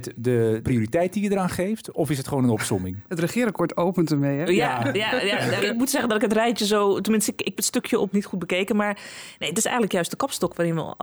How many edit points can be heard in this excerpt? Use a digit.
3